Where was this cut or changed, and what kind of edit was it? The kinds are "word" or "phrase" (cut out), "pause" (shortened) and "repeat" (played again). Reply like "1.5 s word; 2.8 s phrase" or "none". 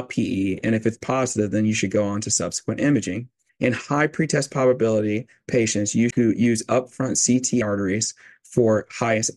3.5 s pause; 6.1 s word; 7.6 s phrase